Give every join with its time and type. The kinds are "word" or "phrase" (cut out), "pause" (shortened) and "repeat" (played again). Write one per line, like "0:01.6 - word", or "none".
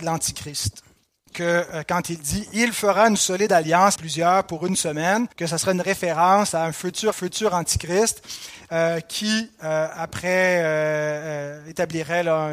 0:04.0 - word
0:05.3 - pause
0:07.1 - repeat

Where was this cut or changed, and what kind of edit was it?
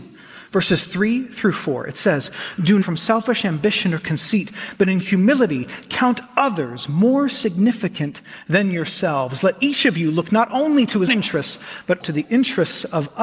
0:02.8 - word
0:11.1 - word
0:12.0 - word

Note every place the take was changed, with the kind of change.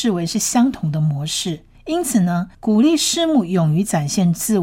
0:01.7 - pause
0:02.5 - pause

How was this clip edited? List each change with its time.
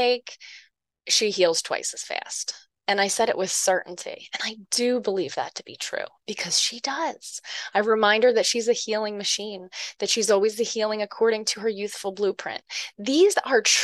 none

